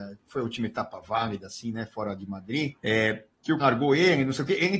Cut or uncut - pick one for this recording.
cut